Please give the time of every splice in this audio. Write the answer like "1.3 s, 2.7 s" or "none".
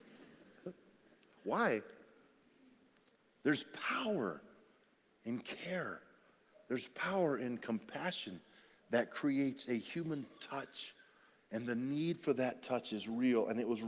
none